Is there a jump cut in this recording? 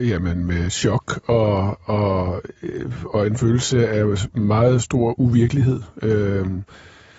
no; 0 cuts

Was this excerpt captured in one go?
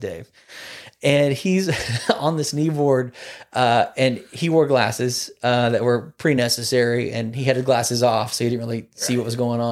yes; 0 cuts

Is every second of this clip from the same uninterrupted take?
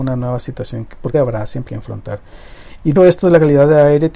no; 3 cuts; at 1.1 s, 1.7 s, 3.0 s

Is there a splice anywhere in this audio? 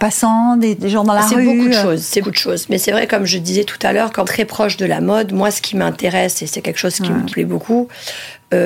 yes; 3 cuts; at 2.2 s, 4.2 s, 7.3 s

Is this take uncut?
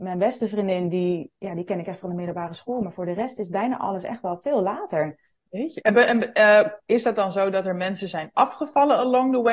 yes; 0 cuts

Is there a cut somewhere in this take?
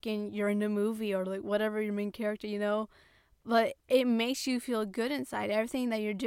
yes; 1 cut; at 3.8 s

